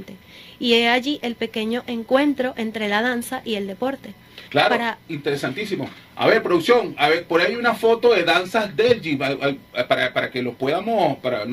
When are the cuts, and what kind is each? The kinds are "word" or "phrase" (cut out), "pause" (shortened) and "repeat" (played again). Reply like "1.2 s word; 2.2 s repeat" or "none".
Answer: 4.5 s pause

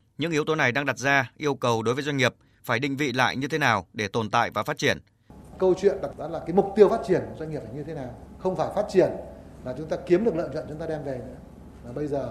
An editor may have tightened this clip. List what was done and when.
6.1 s word

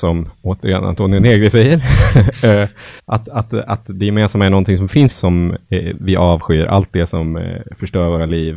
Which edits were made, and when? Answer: 3.0 s pause; 5.1 s phrase

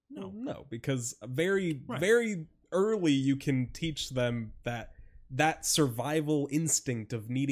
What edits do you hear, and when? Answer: none

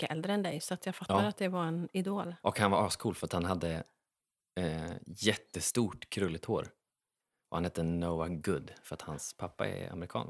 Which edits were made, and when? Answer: none

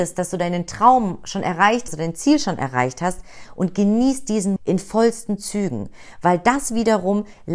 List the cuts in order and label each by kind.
1.9 s phrase; 4.6 s word

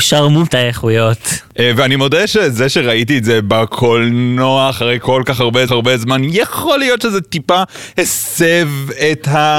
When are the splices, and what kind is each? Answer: 5.7 s repeat

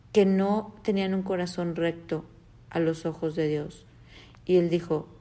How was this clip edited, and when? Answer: none

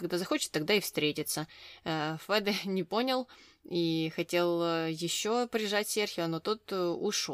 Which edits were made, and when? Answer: none

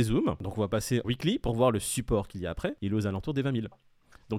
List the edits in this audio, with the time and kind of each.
1.0 s word

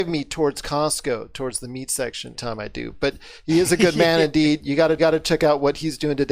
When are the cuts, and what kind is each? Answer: 2.3 s word; 5.0 s repeat

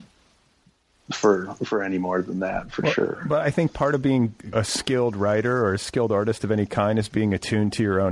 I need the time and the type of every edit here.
4.5 s word

